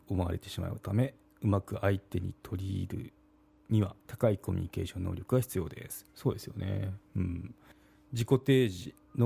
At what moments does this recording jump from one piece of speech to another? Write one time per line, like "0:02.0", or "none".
0:04.0